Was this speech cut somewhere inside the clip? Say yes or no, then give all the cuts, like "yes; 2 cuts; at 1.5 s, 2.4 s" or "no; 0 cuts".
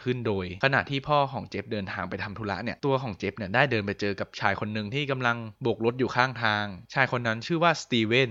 yes; 2 cuts; at 5.6 s, 6.9 s